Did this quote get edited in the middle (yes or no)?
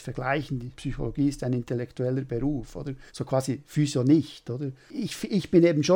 yes